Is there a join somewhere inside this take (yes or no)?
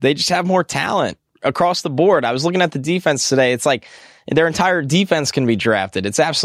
no